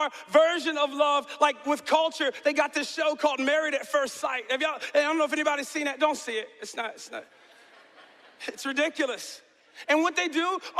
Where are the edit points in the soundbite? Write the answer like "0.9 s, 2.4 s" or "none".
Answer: none